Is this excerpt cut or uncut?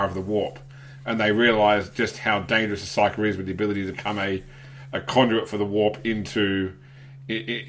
cut